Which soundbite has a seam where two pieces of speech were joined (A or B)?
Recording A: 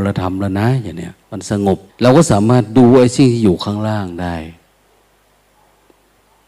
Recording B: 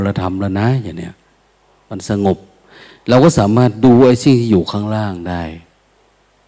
A